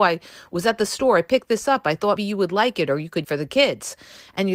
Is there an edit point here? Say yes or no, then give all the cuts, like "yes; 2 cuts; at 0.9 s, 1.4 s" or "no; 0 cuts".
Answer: yes; 2 cuts; at 2.2 s, 3.2 s